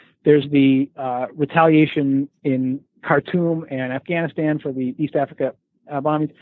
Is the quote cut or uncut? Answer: uncut